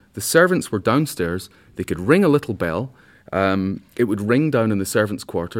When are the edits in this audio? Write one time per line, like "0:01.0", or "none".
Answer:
none